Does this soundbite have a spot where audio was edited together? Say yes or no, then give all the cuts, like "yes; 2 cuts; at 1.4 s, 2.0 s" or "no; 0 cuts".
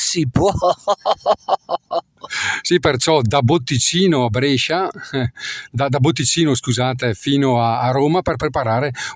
no; 0 cuts